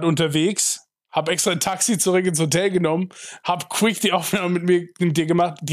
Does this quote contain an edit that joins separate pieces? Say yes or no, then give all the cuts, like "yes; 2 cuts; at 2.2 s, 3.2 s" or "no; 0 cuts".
no; 0 cuts